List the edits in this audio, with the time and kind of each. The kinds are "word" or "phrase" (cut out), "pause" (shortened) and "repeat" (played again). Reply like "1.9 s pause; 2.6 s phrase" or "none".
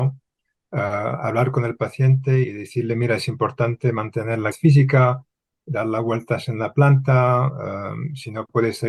2.4 s word; 4.5 s word